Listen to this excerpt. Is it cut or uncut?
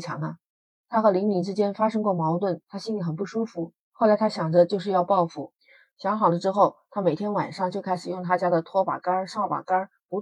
uncut